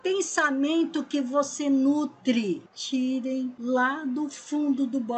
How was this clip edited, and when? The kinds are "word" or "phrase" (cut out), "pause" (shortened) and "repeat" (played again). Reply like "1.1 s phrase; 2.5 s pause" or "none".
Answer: 2.7 s pause

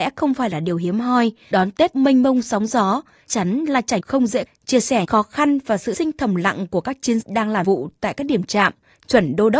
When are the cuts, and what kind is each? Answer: 1.5 s word; 1.9 s word; 3.3 s word; 4.0 s word; 4.5 s word; 5.0 s word; 5.9 s word; 7.2 s word; 7.6 s word

